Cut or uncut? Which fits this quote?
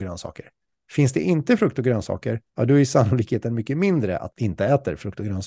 cut